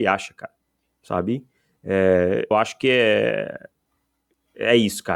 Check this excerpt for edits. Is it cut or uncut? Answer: cut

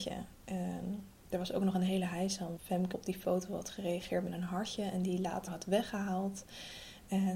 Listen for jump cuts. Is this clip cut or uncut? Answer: cut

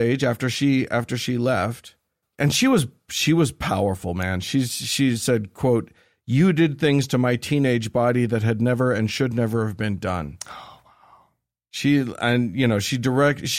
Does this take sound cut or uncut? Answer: uncut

